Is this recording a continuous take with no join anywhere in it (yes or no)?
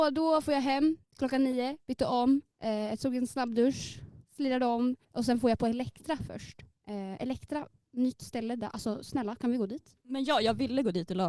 no